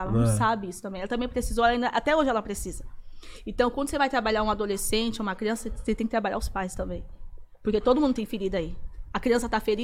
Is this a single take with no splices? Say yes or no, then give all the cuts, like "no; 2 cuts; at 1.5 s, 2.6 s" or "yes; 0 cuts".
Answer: yes; 0 cuts